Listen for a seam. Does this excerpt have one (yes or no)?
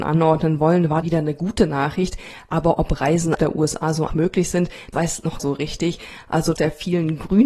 yes